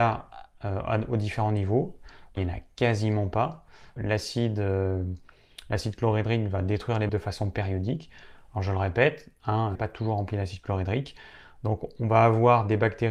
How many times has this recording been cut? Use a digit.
4